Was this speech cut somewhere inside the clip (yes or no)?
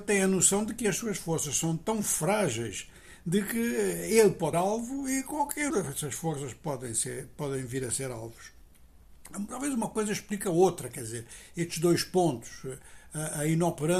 yes